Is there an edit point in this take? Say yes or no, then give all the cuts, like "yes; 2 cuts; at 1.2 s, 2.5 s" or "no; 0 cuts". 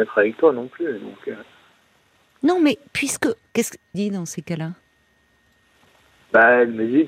yes; 3 cuts; at 2.2 s, 3.4 s, 3.9 s